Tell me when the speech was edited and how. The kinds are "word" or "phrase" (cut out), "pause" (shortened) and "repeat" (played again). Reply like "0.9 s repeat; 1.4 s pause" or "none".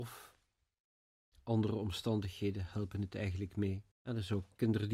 3.9 s pause